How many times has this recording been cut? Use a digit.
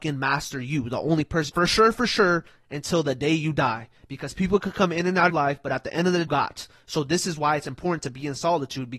3